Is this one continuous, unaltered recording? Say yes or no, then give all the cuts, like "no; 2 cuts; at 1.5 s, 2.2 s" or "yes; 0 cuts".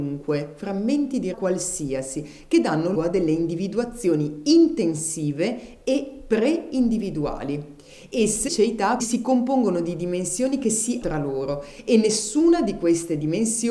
no; 5 cuts; at 1.3 s, 2.9 s, 8.5 s, 9.0 s, 11.0 s